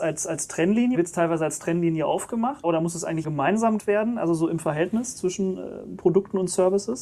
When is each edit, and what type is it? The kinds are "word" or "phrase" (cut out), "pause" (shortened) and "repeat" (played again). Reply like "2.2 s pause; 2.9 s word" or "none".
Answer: 0.9 s word; 2.6 s word; 3.2 s word; 3.8 s word